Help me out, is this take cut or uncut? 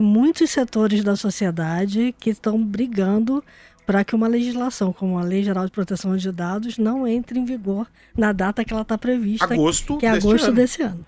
uncut